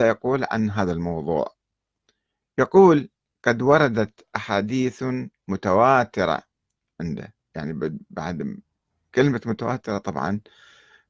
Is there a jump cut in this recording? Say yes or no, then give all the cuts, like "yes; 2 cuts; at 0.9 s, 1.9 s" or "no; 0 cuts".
yes; 1 cut; at 6.9 s